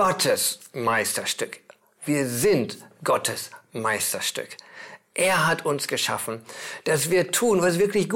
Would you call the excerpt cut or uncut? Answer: uncut